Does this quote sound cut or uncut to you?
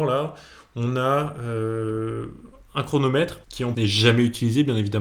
cut